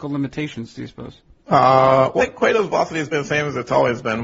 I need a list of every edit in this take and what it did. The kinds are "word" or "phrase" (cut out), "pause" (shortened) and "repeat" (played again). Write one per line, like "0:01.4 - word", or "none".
0:01.4 - pause
0:02.2 - word
0:03.1 - word